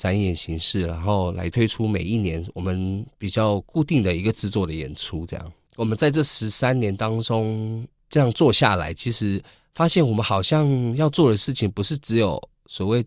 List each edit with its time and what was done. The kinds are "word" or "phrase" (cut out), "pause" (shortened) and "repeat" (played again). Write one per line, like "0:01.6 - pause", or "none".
none